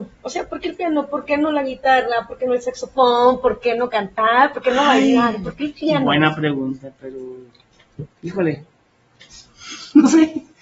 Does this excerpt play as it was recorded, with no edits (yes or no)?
no